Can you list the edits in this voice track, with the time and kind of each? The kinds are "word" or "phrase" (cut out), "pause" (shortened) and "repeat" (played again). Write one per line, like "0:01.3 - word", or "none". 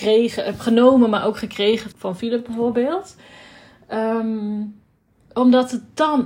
0:01.9 - word